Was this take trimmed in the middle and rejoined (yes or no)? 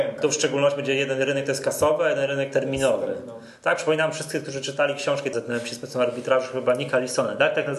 yes